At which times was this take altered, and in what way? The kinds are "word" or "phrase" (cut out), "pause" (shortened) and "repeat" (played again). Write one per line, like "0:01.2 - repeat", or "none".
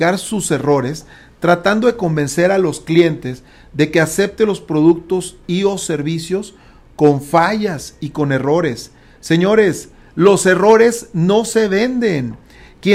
none